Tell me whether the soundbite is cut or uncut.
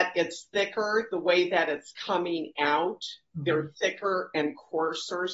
uncut